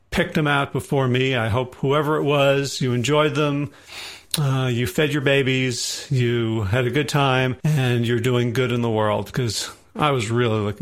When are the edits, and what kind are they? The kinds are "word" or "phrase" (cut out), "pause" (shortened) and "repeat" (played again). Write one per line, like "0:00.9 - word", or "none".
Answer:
0:07.6 - pause